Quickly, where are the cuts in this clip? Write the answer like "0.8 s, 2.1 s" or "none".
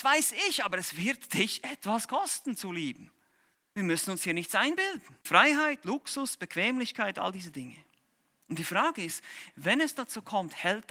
3.5 s, 5.2 s